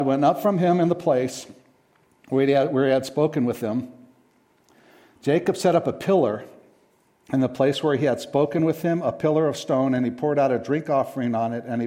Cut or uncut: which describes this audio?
uncut